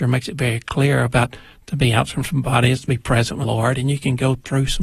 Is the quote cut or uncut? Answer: cut